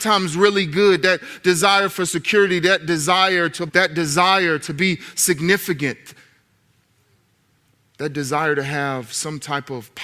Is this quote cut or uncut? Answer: cut